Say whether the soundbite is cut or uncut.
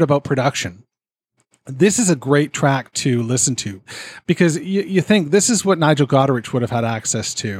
uncut